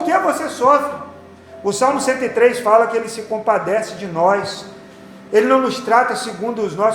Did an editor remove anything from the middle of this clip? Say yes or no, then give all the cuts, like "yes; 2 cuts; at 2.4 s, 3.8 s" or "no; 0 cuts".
no; 0 cuts